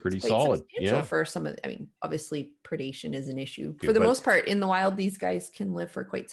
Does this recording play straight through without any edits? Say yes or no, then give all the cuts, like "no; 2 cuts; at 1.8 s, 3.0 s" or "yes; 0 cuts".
no; 2 cuts; at 2.0 s, 3.8 s